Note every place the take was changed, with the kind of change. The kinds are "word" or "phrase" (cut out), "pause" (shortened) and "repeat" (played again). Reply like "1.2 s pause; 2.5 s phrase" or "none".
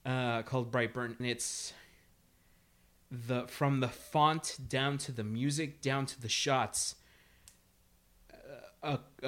1.2 s word